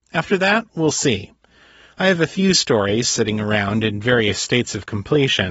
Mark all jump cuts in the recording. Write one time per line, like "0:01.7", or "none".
none

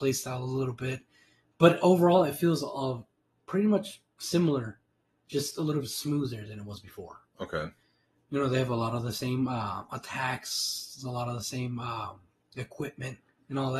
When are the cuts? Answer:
none

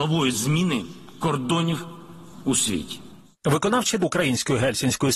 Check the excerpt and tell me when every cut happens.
0:04.0

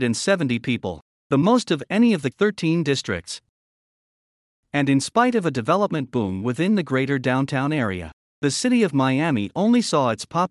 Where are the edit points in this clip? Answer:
0:02.3
0:03.8

